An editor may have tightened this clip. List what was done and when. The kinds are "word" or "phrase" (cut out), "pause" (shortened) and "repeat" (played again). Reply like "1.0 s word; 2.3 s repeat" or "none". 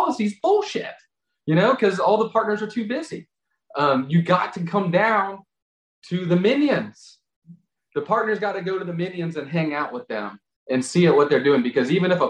none

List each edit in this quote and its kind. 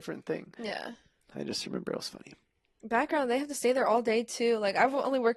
none

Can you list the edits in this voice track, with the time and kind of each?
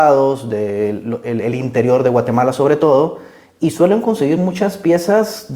none

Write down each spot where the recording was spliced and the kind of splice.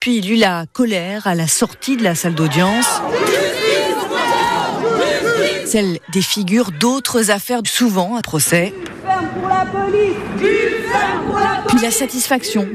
7.6 s phrase; 8.2 s word

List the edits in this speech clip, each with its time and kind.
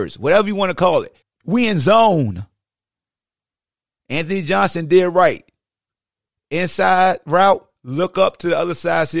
1.2 s pause

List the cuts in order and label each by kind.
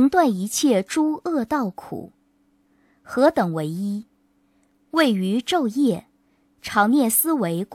none

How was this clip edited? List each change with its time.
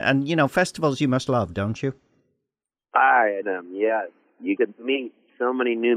1.3 s word; 3.4 s word; 4.6 s word

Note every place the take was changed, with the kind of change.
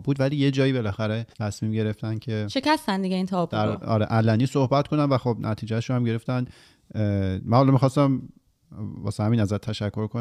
1.3 s pause

